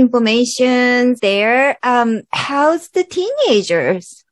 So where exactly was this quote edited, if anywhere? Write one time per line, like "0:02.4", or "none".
0:01.2
0:02.3